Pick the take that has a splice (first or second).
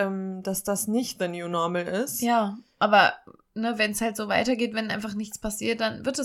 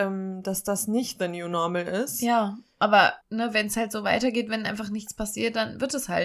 second